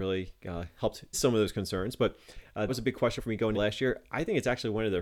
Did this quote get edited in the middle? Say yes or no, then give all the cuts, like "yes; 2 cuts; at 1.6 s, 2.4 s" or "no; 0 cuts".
yes; 4 cuts; at 1.1 s, 2.7 s, 3.2 s, 3.5 s